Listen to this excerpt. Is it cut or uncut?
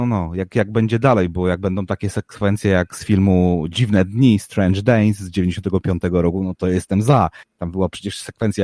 uncut